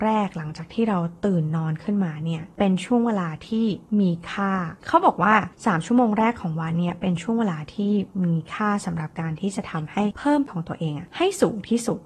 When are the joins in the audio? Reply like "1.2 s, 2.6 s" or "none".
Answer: 10.5 s